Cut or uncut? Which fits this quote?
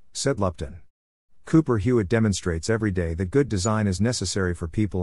uncut